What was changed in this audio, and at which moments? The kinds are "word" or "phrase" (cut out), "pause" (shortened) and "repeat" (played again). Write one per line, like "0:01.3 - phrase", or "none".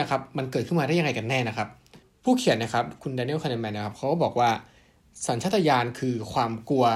0:02.0 - pause